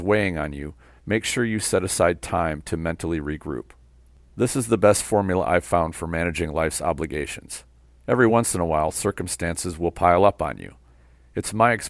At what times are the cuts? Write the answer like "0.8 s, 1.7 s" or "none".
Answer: none